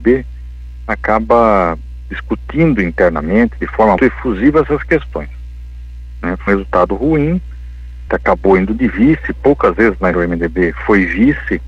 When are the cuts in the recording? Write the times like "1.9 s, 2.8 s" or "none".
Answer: 4.0 s, 6.5 s, 8.1 s, 10.1 s